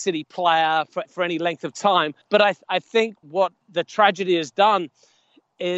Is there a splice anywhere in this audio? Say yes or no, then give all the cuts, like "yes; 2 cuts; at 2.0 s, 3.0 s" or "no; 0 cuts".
yes; 4 cuts; at 1.0 s, 2.2 s, 3.2 s, 3.6 s